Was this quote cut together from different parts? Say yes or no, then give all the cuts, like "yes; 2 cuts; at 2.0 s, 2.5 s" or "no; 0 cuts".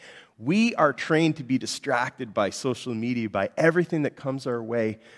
no; 0 cuts